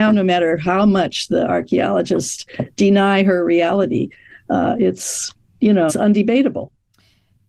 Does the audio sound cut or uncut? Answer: cut